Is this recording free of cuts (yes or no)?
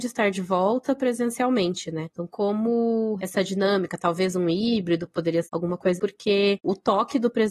no